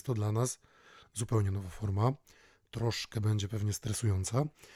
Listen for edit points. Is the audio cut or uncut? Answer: uncut